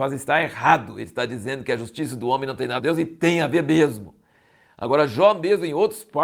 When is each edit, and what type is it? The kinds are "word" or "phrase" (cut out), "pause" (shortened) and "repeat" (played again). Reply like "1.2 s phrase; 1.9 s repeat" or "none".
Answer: 2.8 s phrase